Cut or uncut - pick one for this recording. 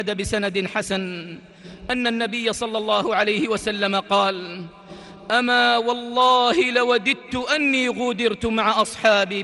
uncut